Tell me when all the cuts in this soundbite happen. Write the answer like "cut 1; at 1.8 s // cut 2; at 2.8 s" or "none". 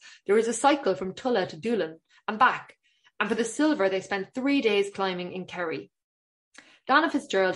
none